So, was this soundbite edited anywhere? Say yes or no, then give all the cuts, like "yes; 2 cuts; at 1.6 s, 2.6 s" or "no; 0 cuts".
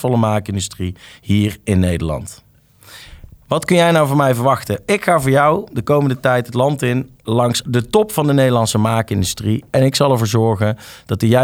yes; 1 cut; at 7.2 s